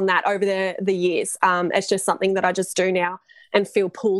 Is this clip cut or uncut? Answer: uncut